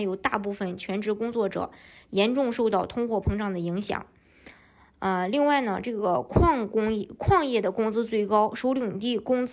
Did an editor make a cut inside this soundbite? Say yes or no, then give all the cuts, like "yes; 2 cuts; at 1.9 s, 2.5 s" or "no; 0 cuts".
no; 0 cuts